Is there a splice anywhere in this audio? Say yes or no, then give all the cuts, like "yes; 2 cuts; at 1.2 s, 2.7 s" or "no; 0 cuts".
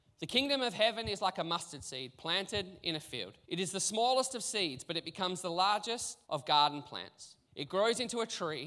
yes; 3 cuts; at 3.4 s, 6.2 s, 7.5 s